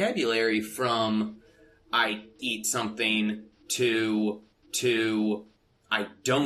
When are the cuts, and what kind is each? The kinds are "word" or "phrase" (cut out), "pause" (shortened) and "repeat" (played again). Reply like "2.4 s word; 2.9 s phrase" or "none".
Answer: 2.4 s word; 4.6 s repeat